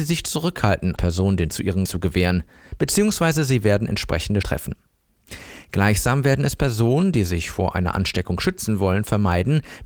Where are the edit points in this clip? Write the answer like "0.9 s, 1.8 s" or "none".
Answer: 1.0 s, 1.5 s, 1.9 s, 4.4 s